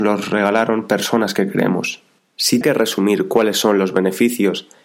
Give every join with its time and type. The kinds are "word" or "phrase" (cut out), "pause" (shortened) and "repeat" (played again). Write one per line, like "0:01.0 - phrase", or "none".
0:02.6 - word